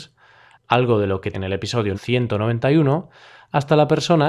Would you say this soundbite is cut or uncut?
cut